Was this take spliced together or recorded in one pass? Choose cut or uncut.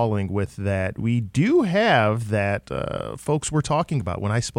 uncut